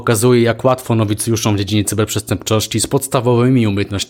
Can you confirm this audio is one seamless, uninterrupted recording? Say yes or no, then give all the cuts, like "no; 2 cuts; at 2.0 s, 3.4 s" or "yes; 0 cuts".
yes; 0 cuts